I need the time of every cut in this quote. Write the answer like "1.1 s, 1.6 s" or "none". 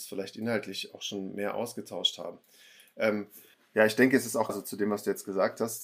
3.5 s, 4.5 s

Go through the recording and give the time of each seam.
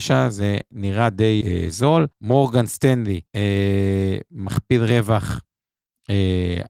1.4 s, 2.1 s, 3.3 s

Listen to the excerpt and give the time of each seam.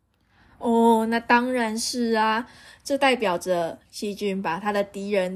none

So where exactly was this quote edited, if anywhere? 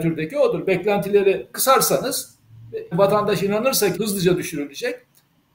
2.9 s, 3.9 s

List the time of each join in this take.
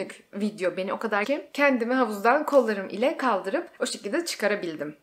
1.2 s

